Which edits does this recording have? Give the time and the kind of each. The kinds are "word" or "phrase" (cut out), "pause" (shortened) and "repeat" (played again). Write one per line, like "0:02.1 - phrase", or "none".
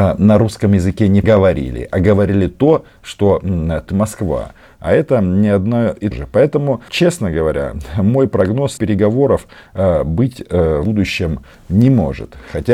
0:01.2 - word
0:03.9 - word
0:06.1 - word
0:06.9 - word
0:08.8 - word
0:10.8 - word